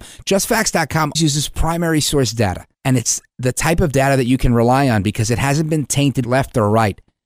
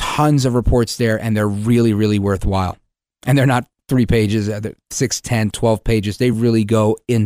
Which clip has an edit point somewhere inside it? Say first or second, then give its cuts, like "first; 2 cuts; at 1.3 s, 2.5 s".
first; 3 cuts; at 1.1 s, 2.7 s, 6.2 s